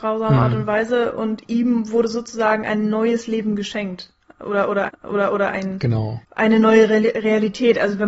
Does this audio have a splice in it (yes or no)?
yes